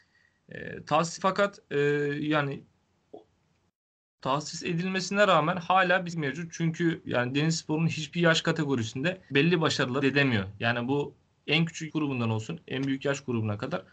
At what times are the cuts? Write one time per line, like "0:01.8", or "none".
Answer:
0:01.2
0:06.1
0:07.0
0:09.3
0:10.0
0:11.9